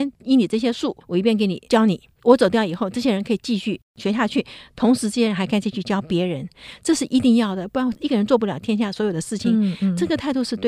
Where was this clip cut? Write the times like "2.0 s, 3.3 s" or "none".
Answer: 1.0 s